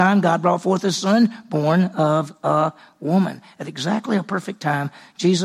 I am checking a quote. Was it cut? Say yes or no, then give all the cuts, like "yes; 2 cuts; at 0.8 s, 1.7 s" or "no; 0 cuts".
no; 0 cuts